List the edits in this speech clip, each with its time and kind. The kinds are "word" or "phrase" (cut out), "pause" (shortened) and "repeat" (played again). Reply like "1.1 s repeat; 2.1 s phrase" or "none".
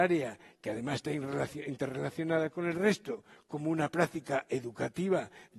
none